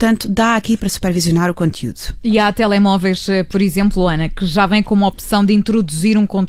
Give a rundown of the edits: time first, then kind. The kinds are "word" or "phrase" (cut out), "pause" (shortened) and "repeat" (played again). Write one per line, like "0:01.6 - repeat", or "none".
none

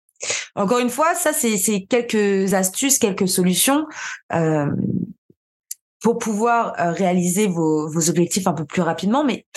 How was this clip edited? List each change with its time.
none

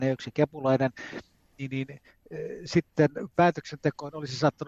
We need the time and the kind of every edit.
none

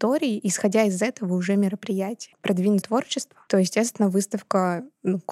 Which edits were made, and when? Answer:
0:02.3 - phrase
0:02.8 - word

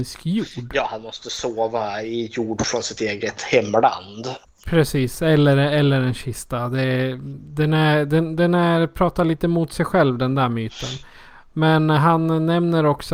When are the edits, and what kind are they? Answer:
none

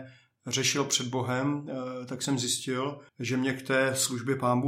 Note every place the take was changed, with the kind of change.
0:03.1 - pause

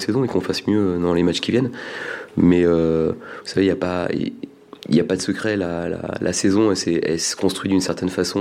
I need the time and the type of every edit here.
0:04.8 - pause

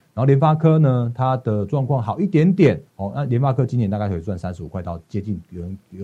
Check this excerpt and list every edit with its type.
0:02.9 - pause

